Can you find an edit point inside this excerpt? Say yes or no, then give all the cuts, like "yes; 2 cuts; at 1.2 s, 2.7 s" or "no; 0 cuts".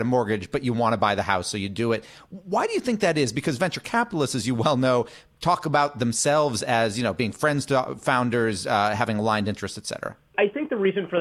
no; 0 cuts